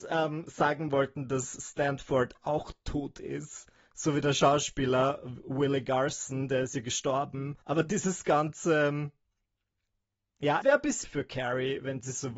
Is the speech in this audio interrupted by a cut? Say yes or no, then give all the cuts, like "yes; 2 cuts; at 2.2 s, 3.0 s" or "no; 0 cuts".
yes; 3 cuts; at 7.6 s, 10.6 s, 11.0 s